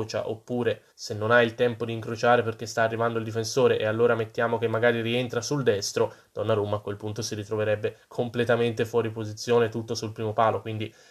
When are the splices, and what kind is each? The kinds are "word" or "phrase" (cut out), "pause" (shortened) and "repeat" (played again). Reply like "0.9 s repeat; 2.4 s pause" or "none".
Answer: 0.9 s pause